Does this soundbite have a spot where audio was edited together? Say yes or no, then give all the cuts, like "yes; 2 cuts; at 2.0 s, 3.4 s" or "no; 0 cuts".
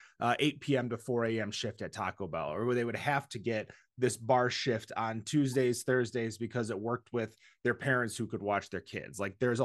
no; 0 cuts